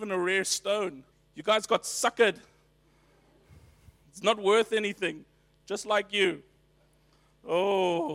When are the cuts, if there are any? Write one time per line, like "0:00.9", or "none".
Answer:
0:01.1